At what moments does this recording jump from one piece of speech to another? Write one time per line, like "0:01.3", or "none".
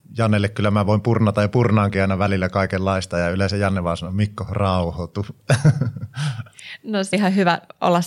0:07.1